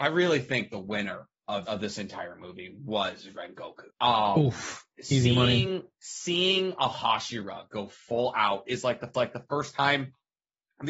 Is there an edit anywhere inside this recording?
yes; 3 cuts; at 1.6 s, 3.9 s, 9.1 s

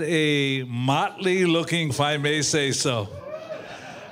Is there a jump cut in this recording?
yes; 1 cut; at 1.9 s

